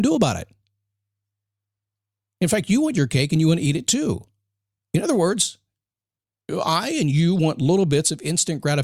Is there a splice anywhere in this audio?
no; 0 cuts

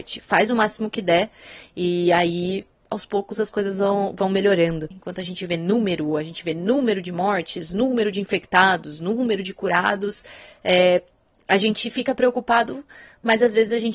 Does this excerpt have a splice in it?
no; 0 cuts

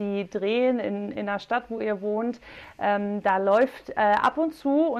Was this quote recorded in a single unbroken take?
yes; 0 cuts

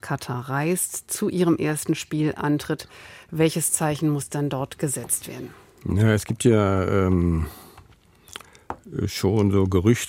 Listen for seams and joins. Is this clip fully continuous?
yes; 0 cuts

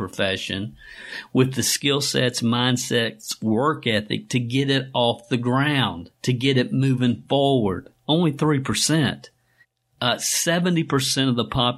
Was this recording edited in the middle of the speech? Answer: yes; 2 cuts; at 6.2 s, 9.6 s

